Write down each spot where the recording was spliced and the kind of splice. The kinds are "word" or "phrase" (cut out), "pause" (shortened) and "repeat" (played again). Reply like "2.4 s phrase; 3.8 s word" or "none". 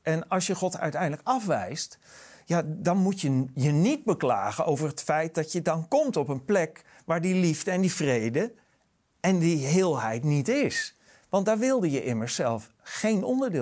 none